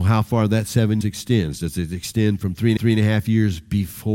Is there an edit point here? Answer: yes; 2 cuts; at 1.0 s, 2.8 s

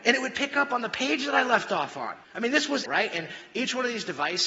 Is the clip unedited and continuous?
no; 2 cuts; at 2.2 s, 2.9 s

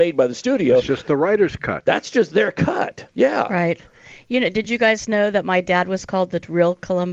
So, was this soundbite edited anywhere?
yes; 1 cut; at 3.1 s

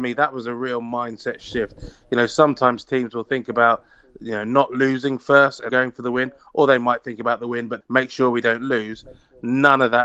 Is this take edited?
yes; 2 cuts; at 5.7 s, 7.8 s

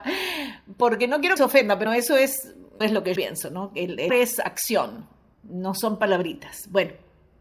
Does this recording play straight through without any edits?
no; 5 cuts; at 1.4 s, 1.9 s, 2.8 s, 3.2 s, 4.1 s

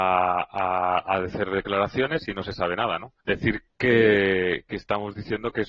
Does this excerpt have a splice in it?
yes; 1 cut; at 3.2 s

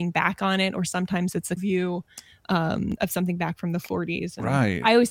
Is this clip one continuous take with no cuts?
no; 2 cuts; at 1.6 s, 3.0 s

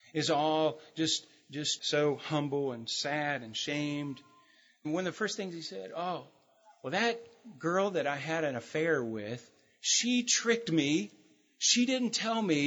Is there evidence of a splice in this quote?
yes; 2 cuts; at 1.8 s, 4.8 s

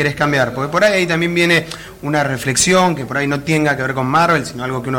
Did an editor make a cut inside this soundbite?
no; 0 cuts

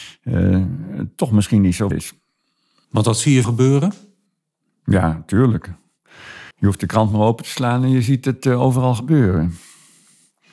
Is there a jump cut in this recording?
yes; 3 cuts; at 1.9 s, 3.4 s, 6.5 s

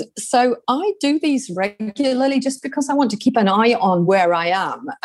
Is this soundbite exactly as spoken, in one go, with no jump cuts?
yes; 0 cuts

